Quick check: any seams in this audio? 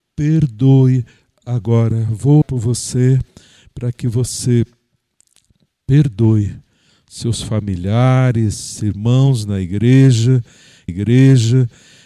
yes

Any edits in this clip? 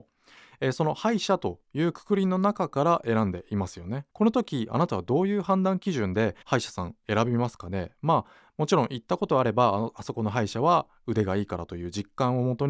yes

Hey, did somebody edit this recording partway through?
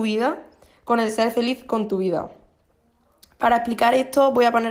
no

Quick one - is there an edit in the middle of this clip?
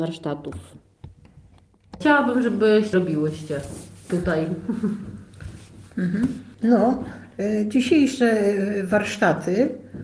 yes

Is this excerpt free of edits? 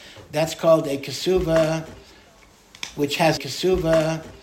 no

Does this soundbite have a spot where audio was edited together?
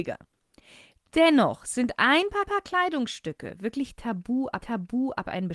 yes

